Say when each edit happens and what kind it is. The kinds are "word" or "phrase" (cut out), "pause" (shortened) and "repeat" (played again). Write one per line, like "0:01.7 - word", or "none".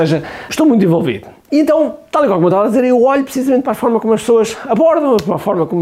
none